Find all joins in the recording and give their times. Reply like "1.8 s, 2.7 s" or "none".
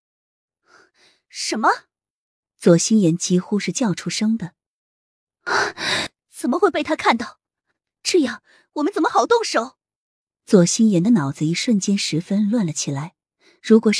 none